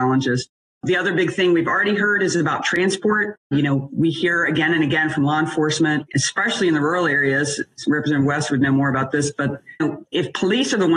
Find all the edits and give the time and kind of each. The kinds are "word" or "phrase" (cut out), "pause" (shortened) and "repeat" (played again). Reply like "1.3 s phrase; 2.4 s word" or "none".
9.8 s word